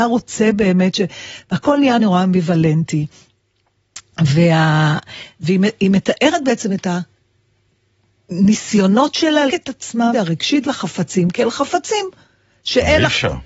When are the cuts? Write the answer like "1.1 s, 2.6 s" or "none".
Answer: 2.0 s, 9.5 s, 10.1 s, 10.6 s